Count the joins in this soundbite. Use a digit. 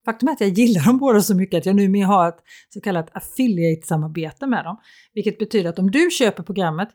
0